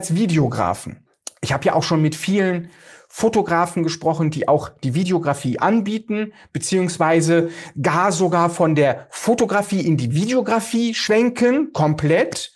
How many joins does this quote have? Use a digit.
0